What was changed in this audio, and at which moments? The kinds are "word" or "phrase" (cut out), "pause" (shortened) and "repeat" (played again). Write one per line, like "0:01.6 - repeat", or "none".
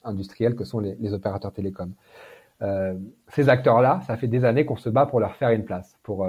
none